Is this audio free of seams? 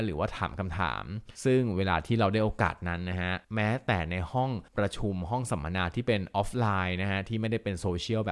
no; 3 cuts; at 1.3 s, 3.4 s, 4.7 s

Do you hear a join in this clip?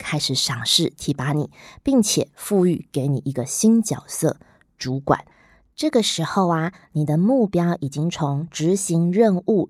no; 0 cuts

